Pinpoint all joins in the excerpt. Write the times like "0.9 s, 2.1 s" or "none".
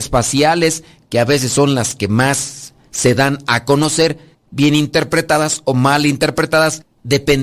none